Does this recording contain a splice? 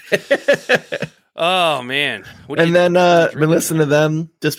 no; 0 cuts

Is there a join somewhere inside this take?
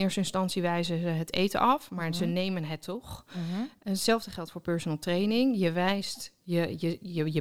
no; 0 cuts

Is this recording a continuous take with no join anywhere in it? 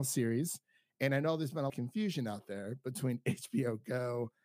no; 1 cut; at 1.7 s

